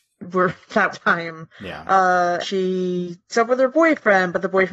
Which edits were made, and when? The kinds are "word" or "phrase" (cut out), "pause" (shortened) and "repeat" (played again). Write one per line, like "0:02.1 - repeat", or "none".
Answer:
0:00.9 - word
0:01.5 - pause
0:02.4 - word
0:03.3 - word